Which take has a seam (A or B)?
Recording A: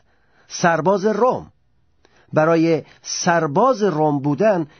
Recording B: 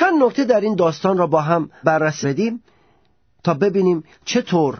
B